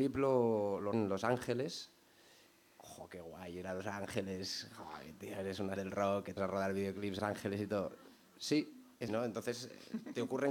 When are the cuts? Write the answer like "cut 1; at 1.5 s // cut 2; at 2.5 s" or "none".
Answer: cut 1; at 0.9 s // cut 2; at 5.8 s // cut 3; at 6.4 s // cut 4; at 7.2 s // cut 5; at 9.1 s